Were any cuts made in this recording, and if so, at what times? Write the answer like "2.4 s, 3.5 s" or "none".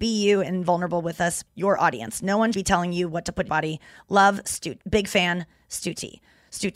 1.5 s, 2.5 s, 3.5 s